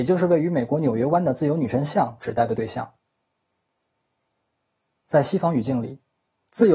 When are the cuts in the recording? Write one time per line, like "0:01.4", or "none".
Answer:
none